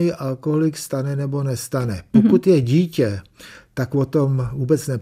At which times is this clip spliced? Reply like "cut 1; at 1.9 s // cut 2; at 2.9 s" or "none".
none